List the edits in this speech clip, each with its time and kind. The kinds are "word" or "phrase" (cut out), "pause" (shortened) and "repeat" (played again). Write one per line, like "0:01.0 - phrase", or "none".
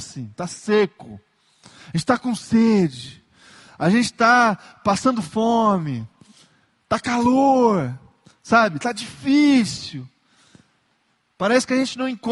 none